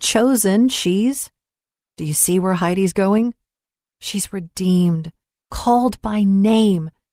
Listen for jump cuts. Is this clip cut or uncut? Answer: uncut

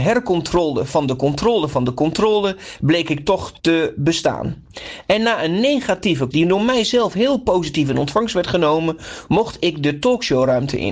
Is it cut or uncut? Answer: cut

